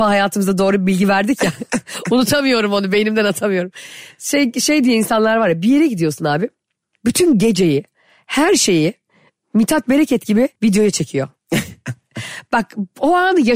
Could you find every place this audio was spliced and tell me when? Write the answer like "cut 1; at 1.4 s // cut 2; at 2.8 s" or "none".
cut 1; at 10.6 s